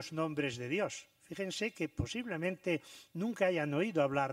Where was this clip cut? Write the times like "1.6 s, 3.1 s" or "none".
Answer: none